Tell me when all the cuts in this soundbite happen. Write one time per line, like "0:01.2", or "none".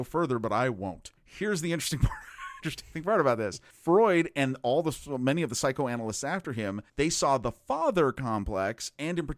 0:01.2
0:03.7
0:06.9